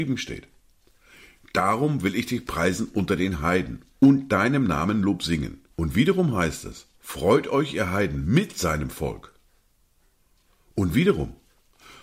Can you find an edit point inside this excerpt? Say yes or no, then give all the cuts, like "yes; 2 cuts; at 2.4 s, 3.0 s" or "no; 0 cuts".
yes; 2 cuts; at 5.7 s, 7.0 s